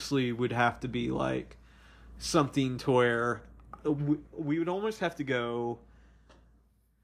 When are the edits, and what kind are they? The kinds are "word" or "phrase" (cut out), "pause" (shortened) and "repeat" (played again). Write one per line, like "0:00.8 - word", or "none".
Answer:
none

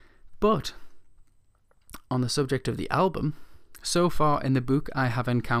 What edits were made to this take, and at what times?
0:02.1 - pause

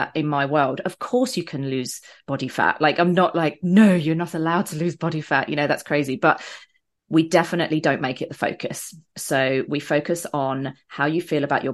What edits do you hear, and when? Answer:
none

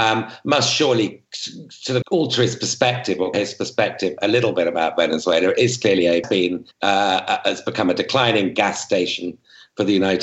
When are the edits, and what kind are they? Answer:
0:02.0 - word
0:03.3 - word
0:06.2 - phrase
0:06.7 - pause

